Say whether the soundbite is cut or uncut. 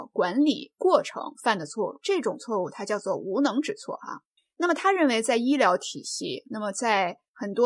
cut